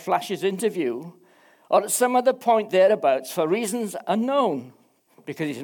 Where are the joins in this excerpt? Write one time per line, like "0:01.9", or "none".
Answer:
none